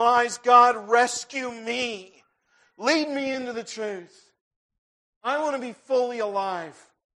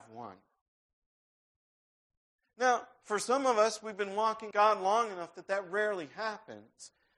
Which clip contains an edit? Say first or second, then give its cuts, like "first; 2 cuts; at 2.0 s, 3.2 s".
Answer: second; 1 cut; at 4.5 s